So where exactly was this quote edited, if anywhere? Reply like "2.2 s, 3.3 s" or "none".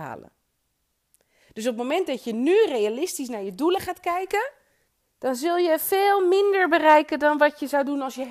4.9 s

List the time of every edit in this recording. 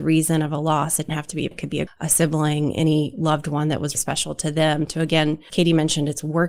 1.1 s, 1.5 s, 1.9 s, 3.9 s, 5.5 s

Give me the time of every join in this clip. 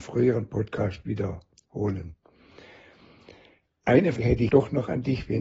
4.2 s, 4.5 s

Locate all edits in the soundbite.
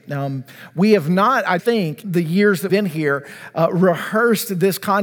1.6 s, 2.0 s, 2.7 s

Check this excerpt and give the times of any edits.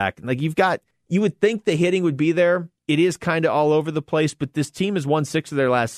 0.9 s, 2.8 s

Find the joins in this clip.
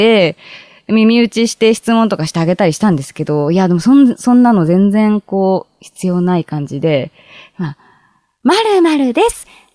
none

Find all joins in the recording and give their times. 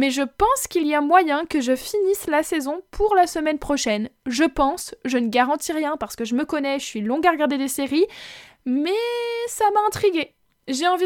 none

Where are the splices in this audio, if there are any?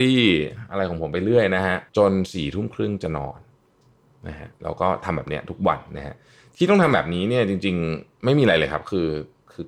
1.9 s, 4.5 s

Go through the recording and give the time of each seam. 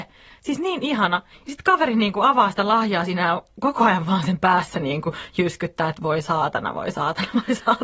none

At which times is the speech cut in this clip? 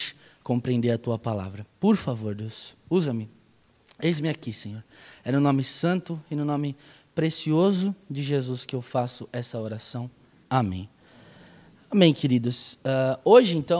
none

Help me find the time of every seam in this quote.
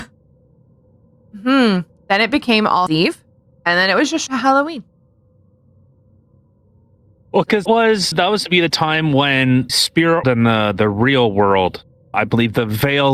2.9 s, 4.3 s, 7.7 s, 8.1 s, 8.4 s, 9.7 s, 10.2 s, 12.1 s

